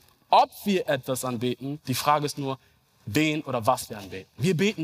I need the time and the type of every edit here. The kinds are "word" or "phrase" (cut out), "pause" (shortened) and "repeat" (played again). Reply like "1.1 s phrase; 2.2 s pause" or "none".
none